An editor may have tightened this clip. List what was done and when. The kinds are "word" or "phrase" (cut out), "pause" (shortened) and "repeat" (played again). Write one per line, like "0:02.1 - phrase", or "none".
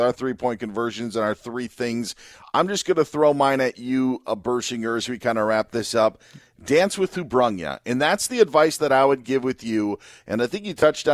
none